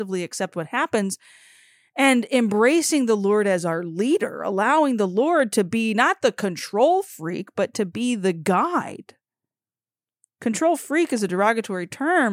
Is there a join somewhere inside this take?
no; 0 cuts

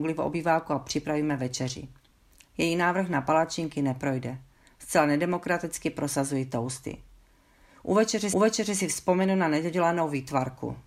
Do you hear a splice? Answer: yes; 1 cut; at 8.3 s

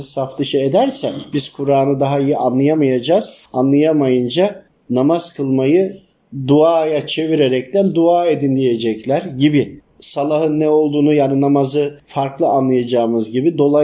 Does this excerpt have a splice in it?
yes; 2 cuts; at 3.5 s, 9.9 s

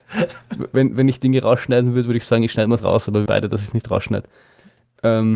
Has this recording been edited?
yes; 2 cuts; at 2.8 s, 3.3 s

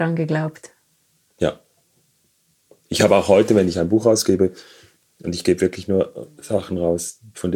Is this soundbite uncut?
yes; 0 cuts

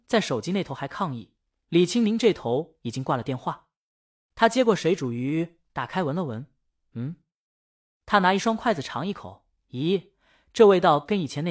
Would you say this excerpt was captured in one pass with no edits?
yes; 0 cuts

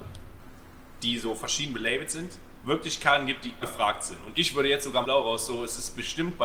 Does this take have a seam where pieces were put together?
yes; 2 cuts; at 3.6 s, 5.0 s

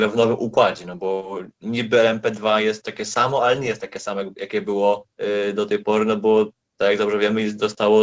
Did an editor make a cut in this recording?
yes; 1 cut; at 5.1 s

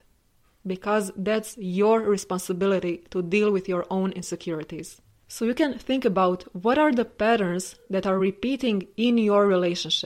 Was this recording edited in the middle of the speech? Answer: no; 0 cuts

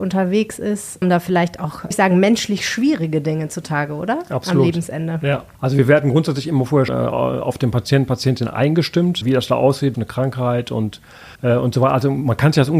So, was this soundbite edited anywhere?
yes; 7 cuts; at 1.0 s, 1.9 s, 5.5 s, 6.9 s, 9.2 s, 9.9 s, 11.4 s

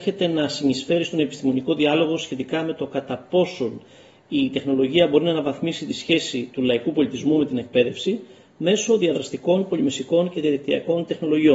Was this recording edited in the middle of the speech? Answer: no; 0 cuts

